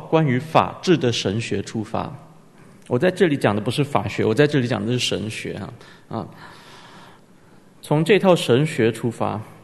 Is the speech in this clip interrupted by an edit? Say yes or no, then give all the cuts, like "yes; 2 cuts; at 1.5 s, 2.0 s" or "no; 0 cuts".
no; 0 cuts